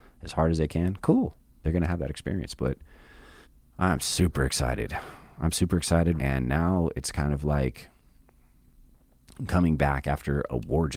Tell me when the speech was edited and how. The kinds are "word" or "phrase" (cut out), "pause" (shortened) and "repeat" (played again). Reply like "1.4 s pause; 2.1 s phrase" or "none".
3.4 s pause; 6.2 s word

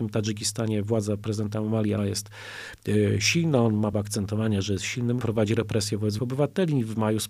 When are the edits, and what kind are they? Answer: 2.0 s word; 3.9 s word; 5.2 s word; 6.2 s word

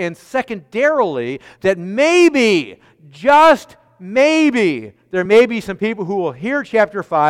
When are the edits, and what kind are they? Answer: none

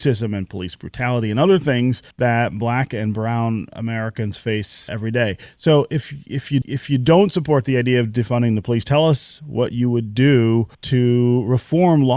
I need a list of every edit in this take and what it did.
2.1 s pause; 4.9 s word; 6.6 s repeat; 10.7 s pause

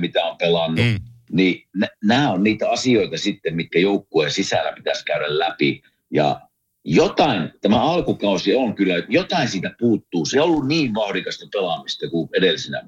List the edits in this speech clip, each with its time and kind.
10.3 s word

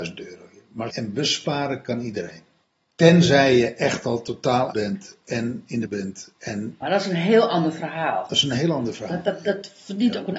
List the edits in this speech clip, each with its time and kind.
0.9 s word; 2.6 s pause; 4.7 s word; 5.9 s word; 6.8 s word

